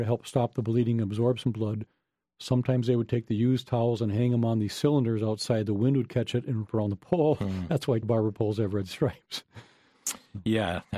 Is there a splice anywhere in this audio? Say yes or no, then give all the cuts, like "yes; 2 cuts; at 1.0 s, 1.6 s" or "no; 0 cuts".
yes; 2 cuts; at 6.7 s, 8.0 s